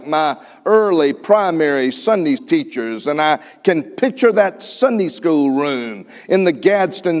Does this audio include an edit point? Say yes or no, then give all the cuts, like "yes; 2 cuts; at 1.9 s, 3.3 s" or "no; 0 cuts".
yes; 1 cut; at 2.4 s